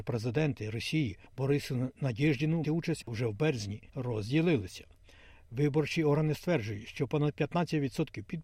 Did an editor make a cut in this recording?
yes; 4 cuts; at 1.3 s, 2.6 s, 3.0 s, 3.9 s

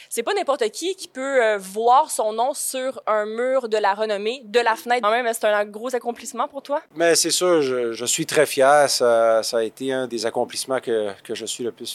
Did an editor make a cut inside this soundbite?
yes; 4 cuts; at 5.0 s, 6.9 s, 7.9 s, 10.1 s

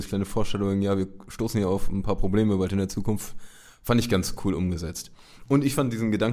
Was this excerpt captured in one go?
yes; 0 cuts

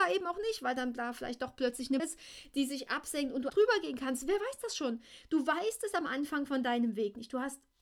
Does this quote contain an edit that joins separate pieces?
yes; 2 cuts; at 2.0 s, 3.5 s

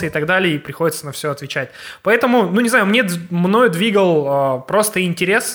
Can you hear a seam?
no; 0 cuts

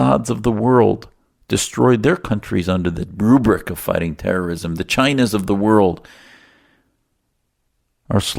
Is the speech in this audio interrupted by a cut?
no; 0 cuts

